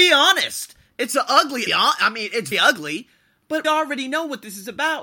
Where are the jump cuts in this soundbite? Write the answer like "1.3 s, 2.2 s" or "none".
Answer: 1.7 s, 2.5 s, 3.6 s